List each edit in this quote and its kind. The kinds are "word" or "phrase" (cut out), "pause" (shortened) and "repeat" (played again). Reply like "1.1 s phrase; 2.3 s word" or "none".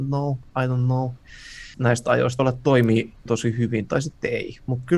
1.7 s word; 2.4 s phrase; 3.3 s word